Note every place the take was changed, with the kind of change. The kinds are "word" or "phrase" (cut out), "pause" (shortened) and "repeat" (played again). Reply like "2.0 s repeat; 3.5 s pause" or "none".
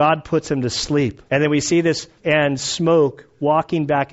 1.3 s pause; 2.2 s word